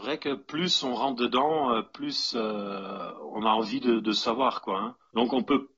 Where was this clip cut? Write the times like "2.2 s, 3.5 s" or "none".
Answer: none